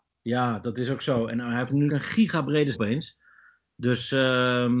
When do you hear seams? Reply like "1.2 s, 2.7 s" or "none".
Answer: 1.9 s, 2.7 s